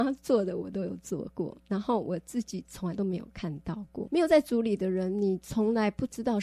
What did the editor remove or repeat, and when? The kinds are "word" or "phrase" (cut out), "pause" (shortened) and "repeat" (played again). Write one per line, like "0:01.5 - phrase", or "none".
0:01.6 - word
0:04.1 - word